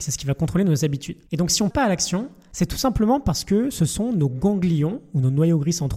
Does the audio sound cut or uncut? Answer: cut